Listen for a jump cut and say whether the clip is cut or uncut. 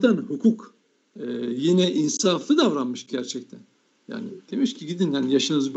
uncut